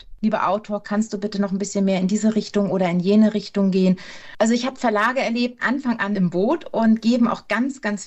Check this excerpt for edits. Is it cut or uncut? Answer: cut